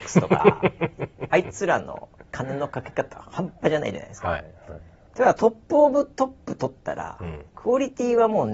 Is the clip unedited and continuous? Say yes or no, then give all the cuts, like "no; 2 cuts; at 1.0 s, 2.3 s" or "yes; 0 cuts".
no; 1 cut; at 7.5 s